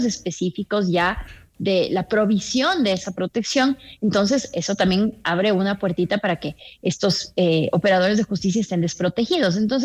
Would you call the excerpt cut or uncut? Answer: uncut